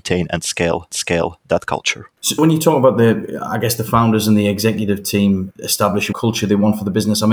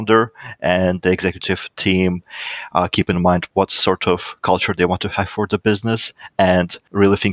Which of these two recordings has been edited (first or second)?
first